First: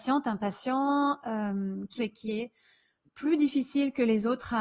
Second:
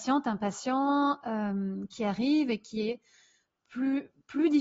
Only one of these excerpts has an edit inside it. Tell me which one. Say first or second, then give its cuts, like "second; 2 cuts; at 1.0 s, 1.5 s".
first; 2 cuts; at 2.0 s, 3.0 s